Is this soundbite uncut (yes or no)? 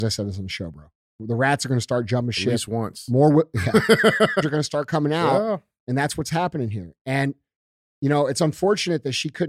no